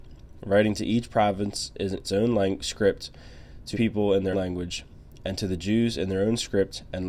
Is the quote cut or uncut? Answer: cut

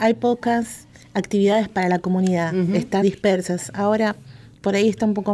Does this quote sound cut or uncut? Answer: cut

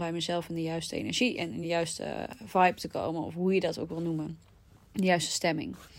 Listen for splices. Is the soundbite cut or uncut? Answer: uncut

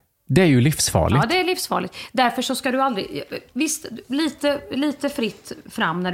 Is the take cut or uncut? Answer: uncut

